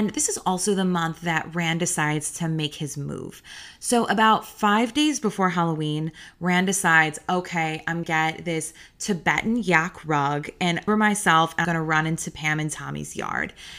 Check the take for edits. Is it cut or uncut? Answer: cut